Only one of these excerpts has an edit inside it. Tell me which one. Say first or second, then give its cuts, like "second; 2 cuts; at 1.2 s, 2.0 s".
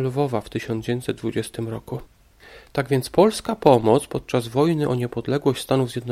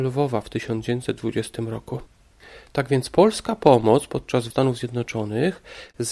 second; 1 cut; at 4.5 s